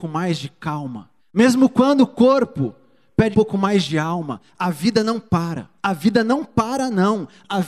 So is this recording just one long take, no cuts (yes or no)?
no